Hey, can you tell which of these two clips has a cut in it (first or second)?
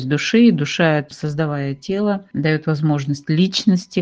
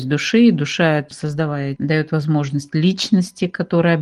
second